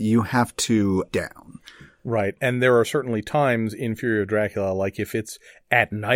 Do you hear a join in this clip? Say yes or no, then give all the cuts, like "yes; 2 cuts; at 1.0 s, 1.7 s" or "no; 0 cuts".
yes; 1 cut; at 1.1 s